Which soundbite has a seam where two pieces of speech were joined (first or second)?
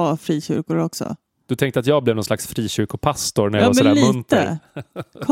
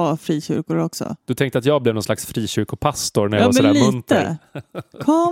second